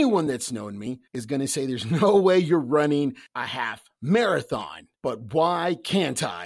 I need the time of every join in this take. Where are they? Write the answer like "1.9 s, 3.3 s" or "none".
1.1 s, 3.3 s, 5.0 s